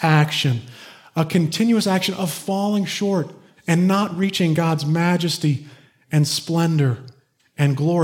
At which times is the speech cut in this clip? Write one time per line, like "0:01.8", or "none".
none